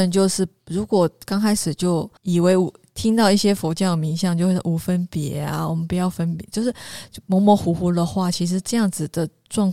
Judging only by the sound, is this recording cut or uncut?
cut